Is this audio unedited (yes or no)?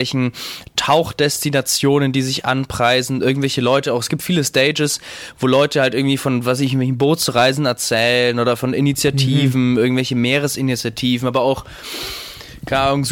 yes